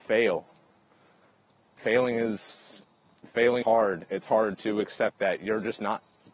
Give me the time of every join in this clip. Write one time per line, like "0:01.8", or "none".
0:03.6